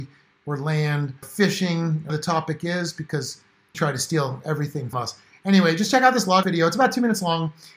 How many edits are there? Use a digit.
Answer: 5